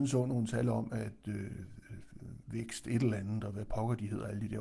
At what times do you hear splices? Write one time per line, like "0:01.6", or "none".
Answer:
none

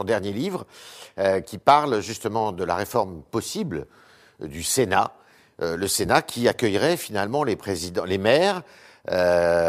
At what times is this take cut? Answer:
none

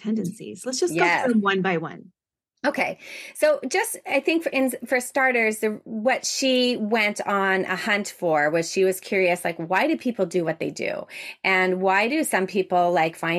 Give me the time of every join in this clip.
none

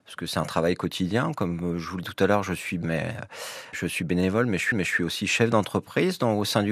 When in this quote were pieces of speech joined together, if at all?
0:02.0
0:02.8
0:03.7
0:04.7

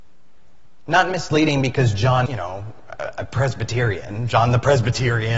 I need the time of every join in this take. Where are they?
0:02.3

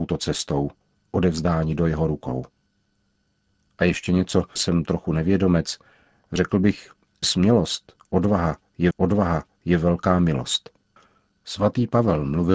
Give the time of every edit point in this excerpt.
0:04.6
0:07.2
0:08.9

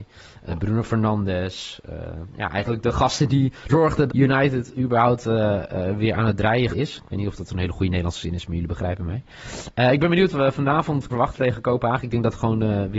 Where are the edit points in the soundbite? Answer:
0:03.7
0:04.1
0:06.7
0:10.3
0:11.1

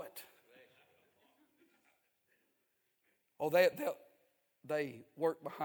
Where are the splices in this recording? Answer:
none

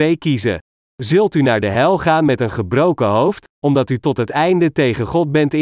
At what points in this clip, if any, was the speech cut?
none

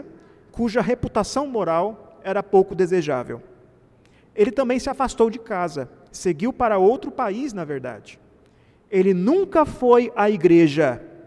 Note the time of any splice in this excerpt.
none

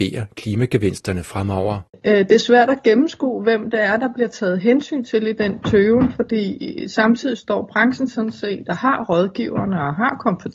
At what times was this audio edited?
0:01.9

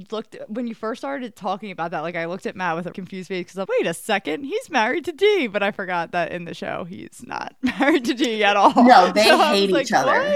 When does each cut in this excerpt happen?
0:02.9
0:03.6

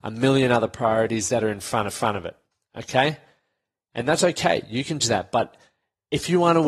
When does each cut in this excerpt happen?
0:01.9
0:05.0

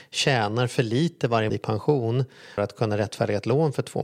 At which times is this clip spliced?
0:01.5
0:02.6

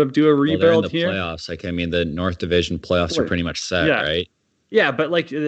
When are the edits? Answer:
none

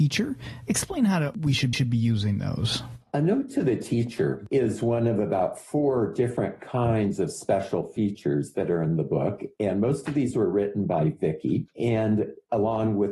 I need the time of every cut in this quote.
0:01.7

